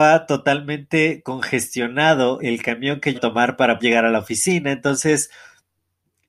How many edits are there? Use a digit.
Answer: 3